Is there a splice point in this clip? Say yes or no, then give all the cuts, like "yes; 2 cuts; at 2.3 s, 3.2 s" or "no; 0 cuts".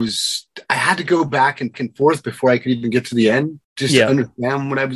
yes; 2 cuts; at 1.7 s, 3.6 s